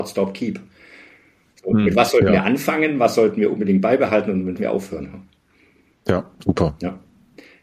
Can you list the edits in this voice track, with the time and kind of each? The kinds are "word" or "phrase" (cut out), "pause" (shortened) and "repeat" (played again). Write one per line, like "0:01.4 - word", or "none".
0:04.6 - phrase
0:06.3 - pause

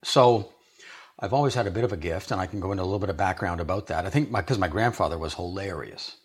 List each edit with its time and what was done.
none

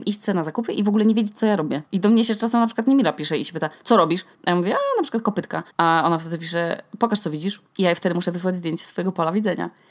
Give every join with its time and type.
0:01.9 - pause
0:04.3 - pause
0:05.7 - pause
0:07.7 - pause

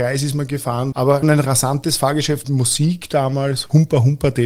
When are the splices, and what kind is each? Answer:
0:00.9 - word
0:01.2 - word
0:02.4 - word

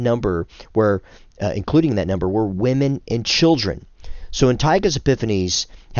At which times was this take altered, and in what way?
none

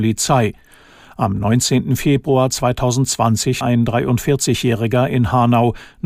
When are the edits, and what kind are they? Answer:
0:03.6 - word

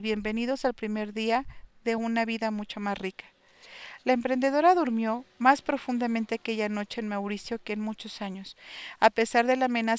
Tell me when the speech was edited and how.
none

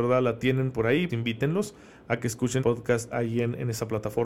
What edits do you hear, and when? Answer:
0:01.1 - word
0:02.6 - word
0:03.1 - word

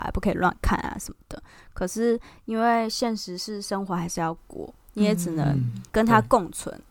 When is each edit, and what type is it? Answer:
0:05.9 - pause

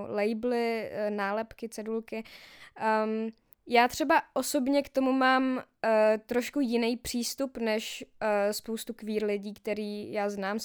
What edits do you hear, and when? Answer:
0:03.5 - pause

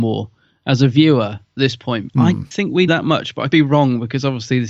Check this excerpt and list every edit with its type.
0:01.6 - word
0:02.1 - word
0:02.5 - word
0:02.9 - word
0:03.5 - word

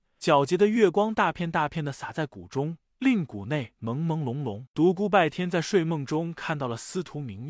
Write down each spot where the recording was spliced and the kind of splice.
0:04.7 - pause

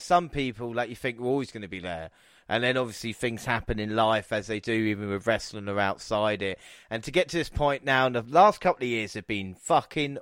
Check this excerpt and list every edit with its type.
none

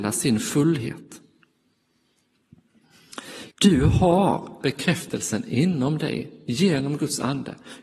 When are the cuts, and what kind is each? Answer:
0:03.5 - pause
0:04.6 - phrase

